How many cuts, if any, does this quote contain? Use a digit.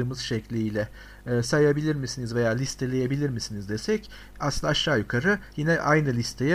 0